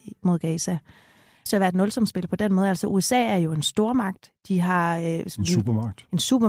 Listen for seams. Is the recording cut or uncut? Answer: cut